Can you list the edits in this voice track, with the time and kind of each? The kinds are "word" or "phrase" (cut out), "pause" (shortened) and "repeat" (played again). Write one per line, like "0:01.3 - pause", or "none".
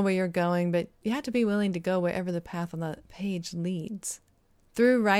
none